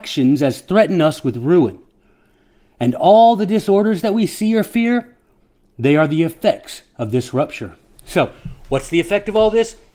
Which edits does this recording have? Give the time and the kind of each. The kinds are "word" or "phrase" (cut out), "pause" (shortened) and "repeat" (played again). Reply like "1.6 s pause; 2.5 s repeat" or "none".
none